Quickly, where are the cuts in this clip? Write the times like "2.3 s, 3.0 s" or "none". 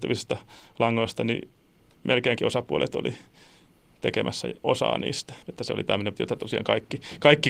2.4 s, 4.6 s, 5.4 s, 6.1 s